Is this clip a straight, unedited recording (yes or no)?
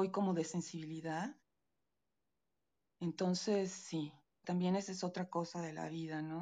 no